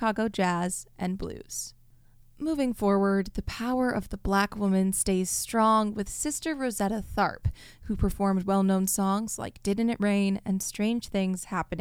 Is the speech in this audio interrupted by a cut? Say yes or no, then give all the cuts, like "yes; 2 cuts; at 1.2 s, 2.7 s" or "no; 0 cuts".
no; 0 cuts